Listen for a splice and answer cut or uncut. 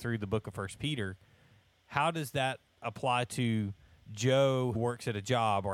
cut